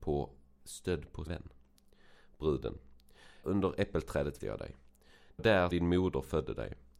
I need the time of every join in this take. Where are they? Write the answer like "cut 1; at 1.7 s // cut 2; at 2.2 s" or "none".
cut 1; at 1.3 s // cut 2; at 3.4 s // cut 3; at 4.4 s // cut 4; at 5.4 s // cut 5; at 5.7 s